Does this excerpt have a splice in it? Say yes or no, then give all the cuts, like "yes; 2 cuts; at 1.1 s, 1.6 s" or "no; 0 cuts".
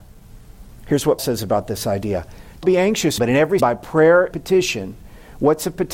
yes; 5 cuts; at 1.2 s, 2.6 s, 3.2 s, 3.6 s, 4.3 s